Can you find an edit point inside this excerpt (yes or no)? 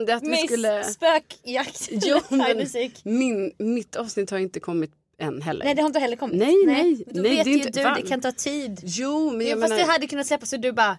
no